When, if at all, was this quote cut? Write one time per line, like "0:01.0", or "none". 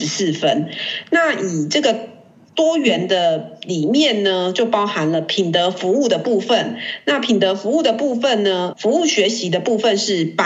0:08.7

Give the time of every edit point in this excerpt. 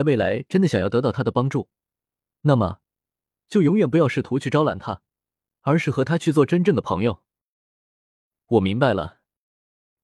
none

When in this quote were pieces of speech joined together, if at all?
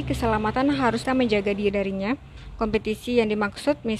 0:01.0
0:01.7

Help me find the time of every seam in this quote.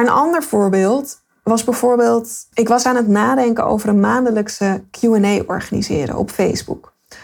0:02.5

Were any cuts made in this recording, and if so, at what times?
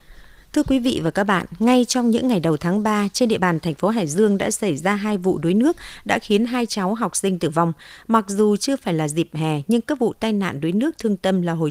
none

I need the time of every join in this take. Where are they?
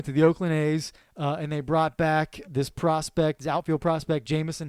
0:02.4

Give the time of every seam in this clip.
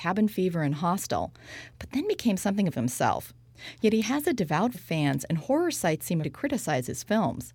0:02.7
0:04.7
0:06.2

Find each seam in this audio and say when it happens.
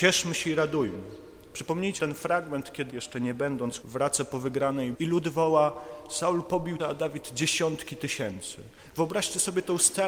0:02.0
0:02.9
0:03.8
0:04.9
0:06.8

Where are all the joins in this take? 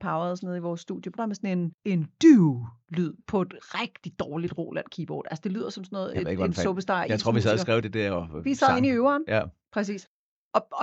0:01.2
0:01.8
0:07.8

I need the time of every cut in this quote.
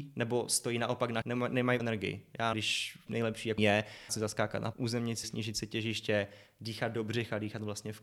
0:01.2
0:01.8
0:02.5
0:03.1
0:03.6
0:04.1
0:04.7
0:05.2

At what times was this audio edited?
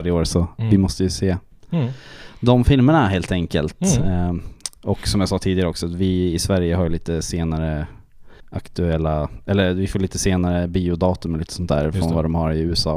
0:08.4

